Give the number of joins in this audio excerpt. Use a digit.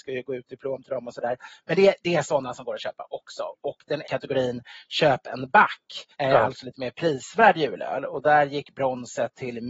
2